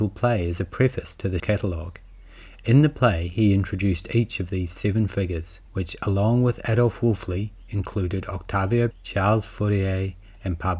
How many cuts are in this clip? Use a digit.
3